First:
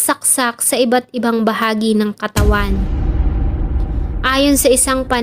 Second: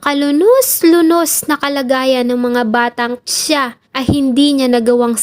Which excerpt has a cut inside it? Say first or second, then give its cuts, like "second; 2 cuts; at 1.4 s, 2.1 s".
second; 2 cuts; at 3.2 s, 3.8 s